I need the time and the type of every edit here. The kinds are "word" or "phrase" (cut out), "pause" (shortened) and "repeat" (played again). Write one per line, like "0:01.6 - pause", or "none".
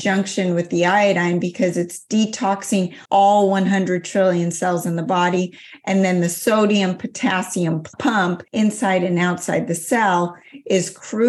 0:03.1 - pause
0:08.5 - pause